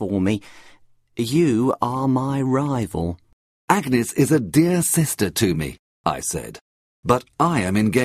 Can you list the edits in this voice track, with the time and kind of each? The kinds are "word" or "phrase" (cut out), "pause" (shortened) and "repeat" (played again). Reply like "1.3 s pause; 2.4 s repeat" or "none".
none